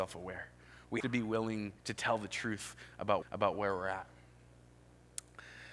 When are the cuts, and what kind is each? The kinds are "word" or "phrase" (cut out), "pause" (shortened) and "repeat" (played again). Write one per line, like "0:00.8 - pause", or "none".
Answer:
0:01.0 - word
0:01.8 - pause
0:03.2 - repeat